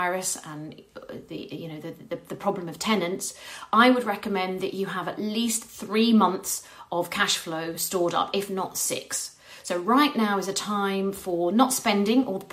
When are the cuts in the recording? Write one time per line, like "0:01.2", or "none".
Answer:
none